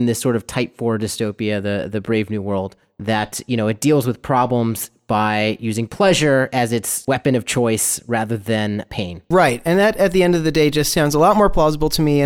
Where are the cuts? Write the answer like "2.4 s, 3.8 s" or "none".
none

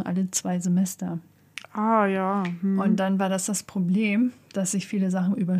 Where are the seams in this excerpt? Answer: 1.6 s

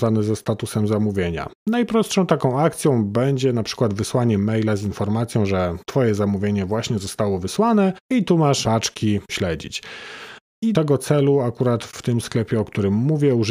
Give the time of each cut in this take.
8.0 s, 8.6 s, 9.3 s, 10.7 s

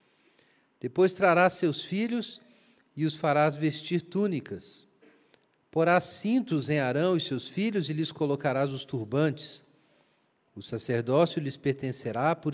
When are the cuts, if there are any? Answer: none

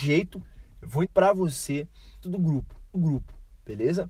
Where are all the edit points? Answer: 1.0 s, 2.2 s, 2.9 s

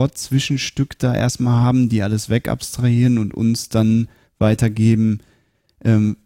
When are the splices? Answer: none

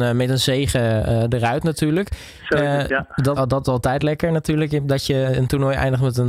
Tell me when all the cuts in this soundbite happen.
3.4 s

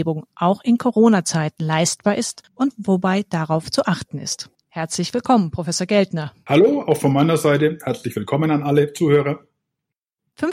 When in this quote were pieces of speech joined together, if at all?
none

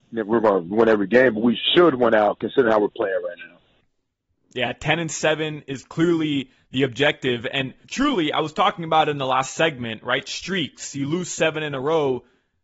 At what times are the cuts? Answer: 7.8 s

